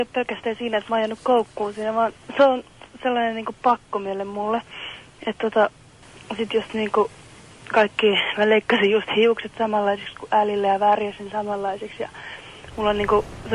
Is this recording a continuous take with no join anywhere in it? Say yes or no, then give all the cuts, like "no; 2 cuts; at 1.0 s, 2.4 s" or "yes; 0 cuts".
yes; 0 cuts